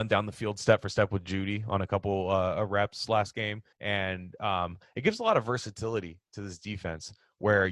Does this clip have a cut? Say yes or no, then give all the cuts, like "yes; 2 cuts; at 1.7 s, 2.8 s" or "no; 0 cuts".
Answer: yes; 1 cut; at 3.7 s